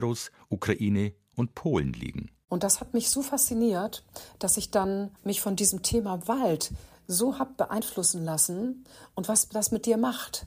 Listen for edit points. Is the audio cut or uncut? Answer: uncut